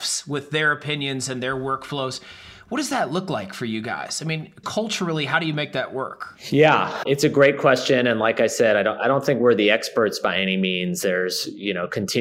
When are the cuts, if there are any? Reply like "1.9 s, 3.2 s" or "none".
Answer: 4.6 s